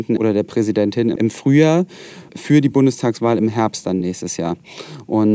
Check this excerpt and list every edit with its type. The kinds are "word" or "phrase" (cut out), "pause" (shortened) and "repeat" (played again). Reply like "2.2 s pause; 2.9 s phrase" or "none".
none